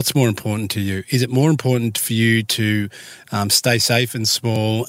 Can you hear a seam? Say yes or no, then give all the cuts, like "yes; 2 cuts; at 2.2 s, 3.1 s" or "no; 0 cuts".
no; 0 cuts